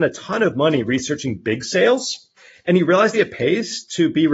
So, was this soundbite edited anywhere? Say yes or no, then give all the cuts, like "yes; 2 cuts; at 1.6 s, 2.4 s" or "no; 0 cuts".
yes; 2 cuts; at 2.4 s, 3.1 s